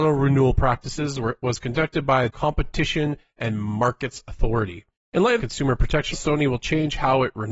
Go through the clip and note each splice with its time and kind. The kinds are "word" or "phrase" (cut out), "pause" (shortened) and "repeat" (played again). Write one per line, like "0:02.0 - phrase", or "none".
0:02.3 - word
0:05.4 - phrase
0:06.1 - word